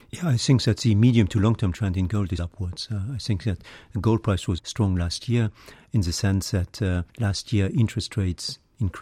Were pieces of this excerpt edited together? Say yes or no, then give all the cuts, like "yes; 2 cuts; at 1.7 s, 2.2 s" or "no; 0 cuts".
yes; 3 cuts; at 2.4 s, 4.6 s, 7.1 s